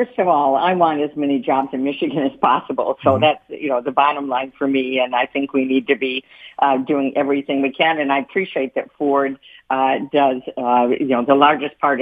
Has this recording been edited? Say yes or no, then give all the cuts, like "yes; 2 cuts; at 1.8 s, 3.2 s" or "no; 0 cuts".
no; 0 cuts